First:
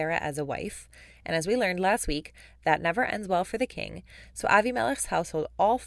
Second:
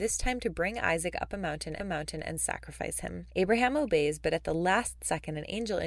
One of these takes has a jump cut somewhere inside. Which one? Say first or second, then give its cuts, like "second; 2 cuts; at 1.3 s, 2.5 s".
second; 1 cut; at 1.8 s